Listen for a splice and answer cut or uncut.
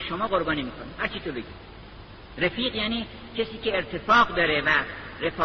uncut